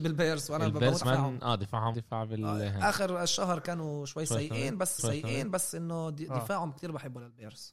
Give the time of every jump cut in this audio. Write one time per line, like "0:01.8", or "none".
0:01.0
0:01.9
0:05.0